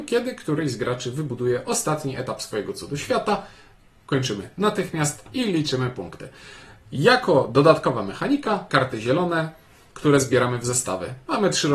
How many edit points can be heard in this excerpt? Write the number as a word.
one